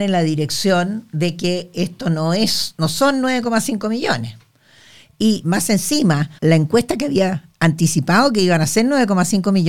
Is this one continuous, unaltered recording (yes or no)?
no